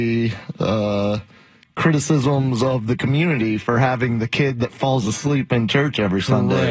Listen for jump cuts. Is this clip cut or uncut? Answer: uncut